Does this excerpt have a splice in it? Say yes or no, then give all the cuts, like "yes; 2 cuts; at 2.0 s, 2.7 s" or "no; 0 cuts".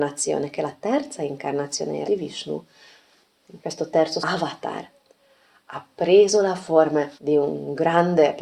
yes; 4 cuts; at 2.0 s, 3.6 s, 4.2 s, 7.2 s